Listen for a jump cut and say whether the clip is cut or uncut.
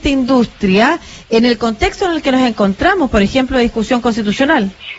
uncut